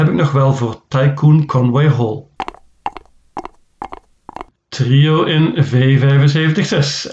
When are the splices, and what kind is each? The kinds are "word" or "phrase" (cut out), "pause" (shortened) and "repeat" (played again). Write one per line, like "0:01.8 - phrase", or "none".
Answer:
none